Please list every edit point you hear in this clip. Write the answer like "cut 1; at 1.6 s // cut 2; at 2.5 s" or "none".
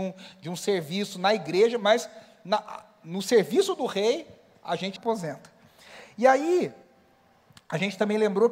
cut 1; at 5.0 s